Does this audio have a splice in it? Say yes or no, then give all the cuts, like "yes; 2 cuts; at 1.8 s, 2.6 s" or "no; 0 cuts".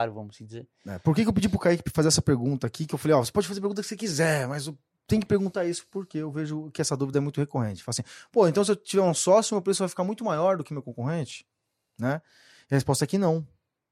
no; 0 cuts